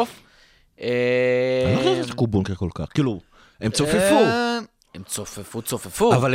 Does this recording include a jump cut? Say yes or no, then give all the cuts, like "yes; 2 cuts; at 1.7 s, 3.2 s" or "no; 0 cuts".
no; 0 cuts